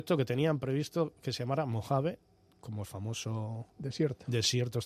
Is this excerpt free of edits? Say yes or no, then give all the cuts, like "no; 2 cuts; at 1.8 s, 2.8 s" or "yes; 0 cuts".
yes; 0 cuts